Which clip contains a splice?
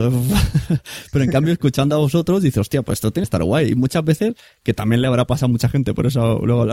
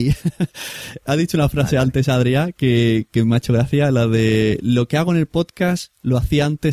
first; 1 cut; at 3.2 s

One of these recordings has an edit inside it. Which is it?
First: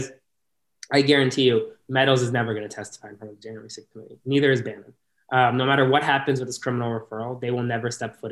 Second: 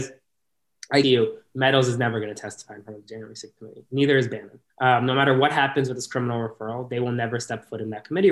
second; 2 cuts; at 1.0 s, 4.7 s

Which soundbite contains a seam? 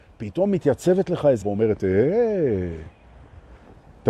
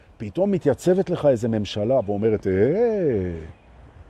first; 1 cut; at 1.4 s

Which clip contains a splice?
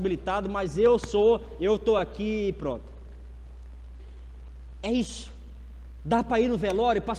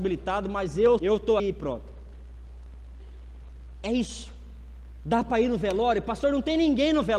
second; 2 cuts; at 1.0 s, 1.4 s

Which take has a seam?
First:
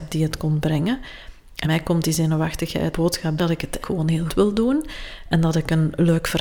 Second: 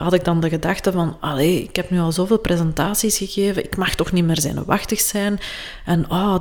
first; 5 cuts; at 1.6 s, 2.9 s, 3.4 s, 3.8 s, 4.3 s

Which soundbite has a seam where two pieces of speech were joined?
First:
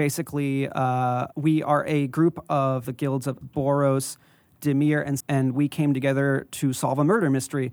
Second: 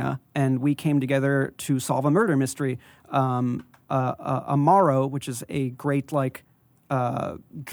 first; 4 cuts; at 1.3 s, 2.8 s, 3.4 s, 5.2 s

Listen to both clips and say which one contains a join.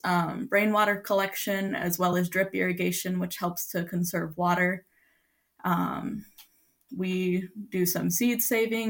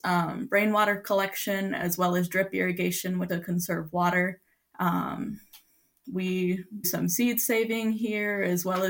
second; 3 cuts; at 3.3 s, 4.5 s, 6.8 s

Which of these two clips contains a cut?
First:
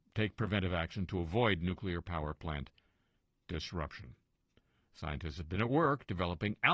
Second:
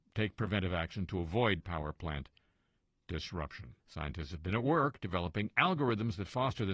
second; 2 cuts; at 1.6 s, 3.8 s

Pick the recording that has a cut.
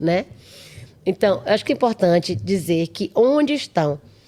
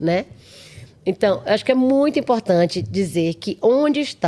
first; 1 cut; at 1.7 s

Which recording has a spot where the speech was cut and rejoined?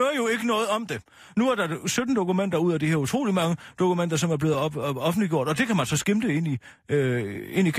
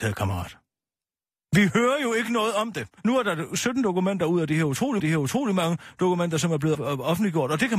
second; 3 cuts; at 3.0 s, 5.0 s, 6.7 s

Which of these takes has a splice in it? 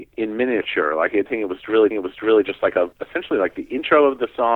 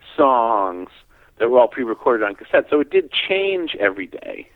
first; 3 cuts; at 1.3 s, 1.9 s, 2.9 s

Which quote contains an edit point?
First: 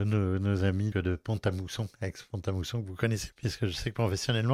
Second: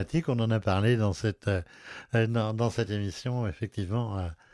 first; 2 cuts; at 0.9 s, 3.3 s

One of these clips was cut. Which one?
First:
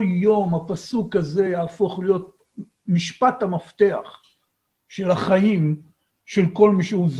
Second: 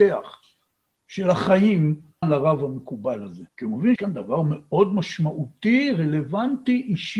second; 3 cuts; at 2.2 s, 3.5 s, 4.0 s

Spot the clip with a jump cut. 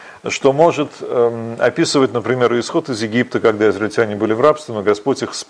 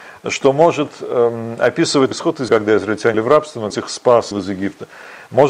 second; 5 cuts; at 2.1 s, 2.5 s, 3.1 s, 3.7 s, 4.3 s

